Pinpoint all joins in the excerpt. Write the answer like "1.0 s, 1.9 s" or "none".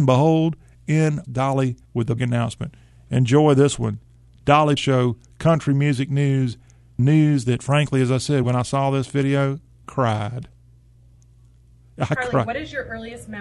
1.2 s, 1.8 s, 2.2 s, 4.8 s, 7.0 s, 8.4 s, 9.8 s